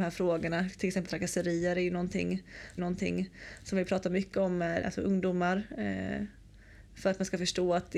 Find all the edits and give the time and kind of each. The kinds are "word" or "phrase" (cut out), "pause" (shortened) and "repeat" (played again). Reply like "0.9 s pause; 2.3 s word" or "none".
1.1 s word; 2.8 s repeat; 4.8 s word